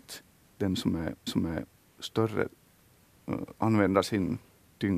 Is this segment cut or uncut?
cut